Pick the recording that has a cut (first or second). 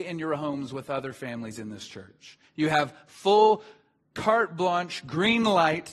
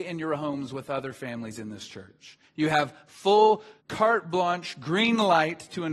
second